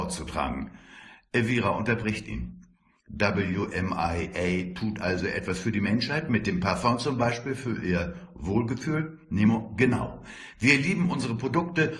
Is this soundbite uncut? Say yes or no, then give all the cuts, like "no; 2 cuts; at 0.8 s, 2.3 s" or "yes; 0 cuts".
yes; 0 cuts